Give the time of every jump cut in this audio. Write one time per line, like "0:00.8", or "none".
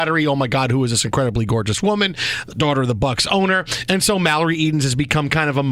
none